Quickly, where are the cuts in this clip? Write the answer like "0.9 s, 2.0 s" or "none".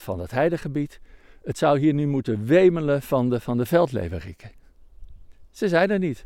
none